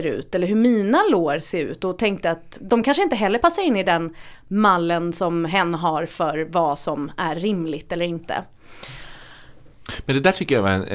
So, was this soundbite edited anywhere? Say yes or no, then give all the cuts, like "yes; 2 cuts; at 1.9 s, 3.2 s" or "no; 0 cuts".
no; 0 cuts